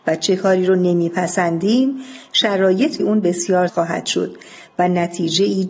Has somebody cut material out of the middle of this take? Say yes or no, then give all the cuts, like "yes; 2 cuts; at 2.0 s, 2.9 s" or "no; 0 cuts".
yes; 2 cuts; at 3.0 s, 3.7 s